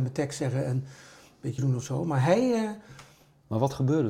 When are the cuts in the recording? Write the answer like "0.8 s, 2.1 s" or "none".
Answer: 1.6 s